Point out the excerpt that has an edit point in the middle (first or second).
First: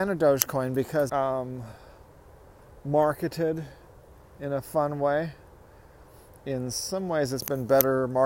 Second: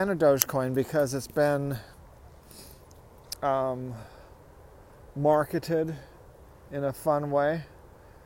first